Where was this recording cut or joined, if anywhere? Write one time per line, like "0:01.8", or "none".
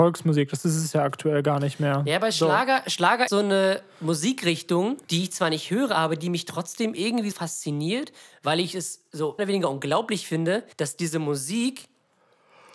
0:03.3
0:05.0
0:07.3
0:09.4
0:10.7